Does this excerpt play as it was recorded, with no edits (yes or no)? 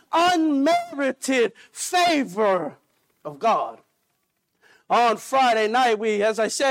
yes